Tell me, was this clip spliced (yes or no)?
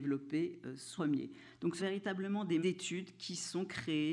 yes